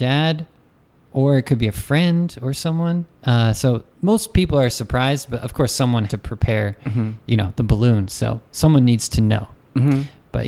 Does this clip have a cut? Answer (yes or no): yes